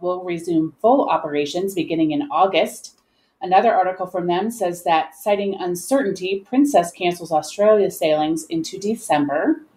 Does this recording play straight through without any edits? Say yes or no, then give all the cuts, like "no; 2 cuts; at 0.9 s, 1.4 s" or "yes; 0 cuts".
yes; 0 cuts